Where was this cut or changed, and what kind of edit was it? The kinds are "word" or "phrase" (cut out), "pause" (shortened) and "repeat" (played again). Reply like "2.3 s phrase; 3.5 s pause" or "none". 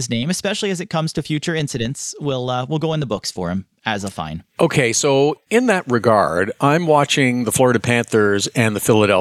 4.5 s pause; 5.4 s pause